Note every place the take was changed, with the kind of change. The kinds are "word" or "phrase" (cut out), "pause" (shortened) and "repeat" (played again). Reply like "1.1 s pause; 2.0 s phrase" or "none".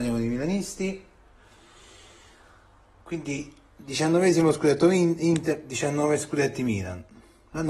none